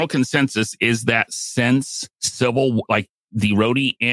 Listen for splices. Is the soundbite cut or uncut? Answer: cut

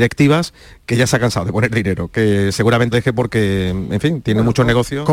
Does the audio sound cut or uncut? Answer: cut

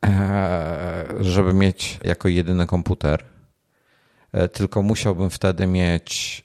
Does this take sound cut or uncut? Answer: cut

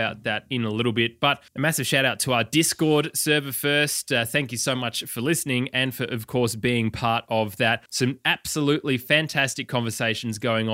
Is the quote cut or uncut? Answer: cut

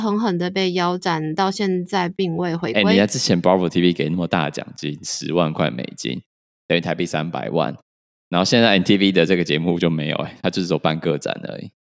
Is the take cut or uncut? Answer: uncut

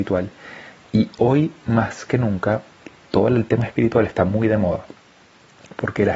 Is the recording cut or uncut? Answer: uncut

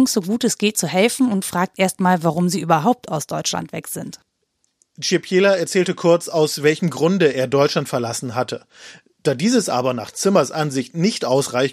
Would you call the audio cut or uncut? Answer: uncut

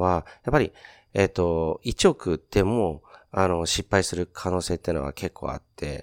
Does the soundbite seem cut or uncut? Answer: uncut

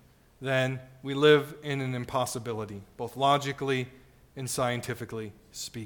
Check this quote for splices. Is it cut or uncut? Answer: uncut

